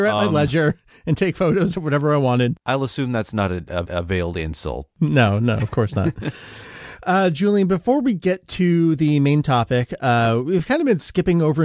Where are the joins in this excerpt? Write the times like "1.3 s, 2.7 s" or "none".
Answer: 3.8 s